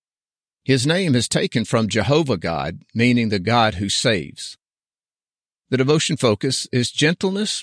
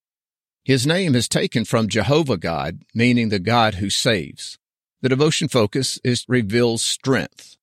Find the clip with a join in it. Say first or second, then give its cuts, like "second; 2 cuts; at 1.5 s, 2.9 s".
second; 2 cuts; at 4.7 s, 6.2 s